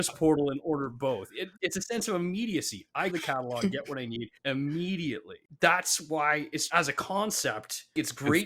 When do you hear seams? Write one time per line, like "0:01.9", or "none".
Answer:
0:01.6
0:03.1
0:04.4
0:06.7